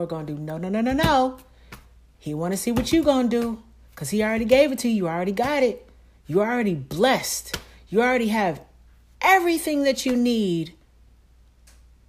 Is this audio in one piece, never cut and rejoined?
yes; 0 cuts

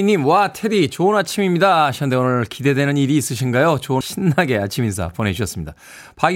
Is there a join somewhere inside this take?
yes; 1 cut; at 4.0 s

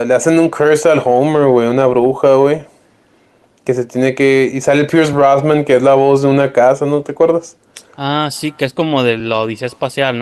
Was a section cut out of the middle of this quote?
no; 0 cuts

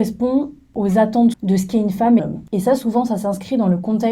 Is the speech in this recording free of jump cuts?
no; 2 cuts; at 1.3 s, 2.2 s

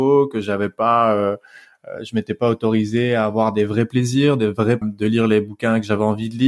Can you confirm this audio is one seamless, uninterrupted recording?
no; 1 cut; at 4.8 s

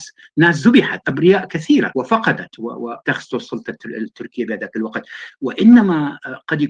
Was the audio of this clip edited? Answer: yes; 3 cuts; at 1.0 s, 1.9 s, 3.0 s

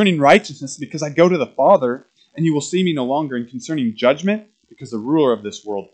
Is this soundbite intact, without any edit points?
yes; 0 cuts

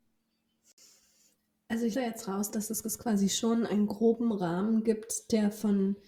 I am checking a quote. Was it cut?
yes; 2 cuts; at 1.9 s, 2.8 s

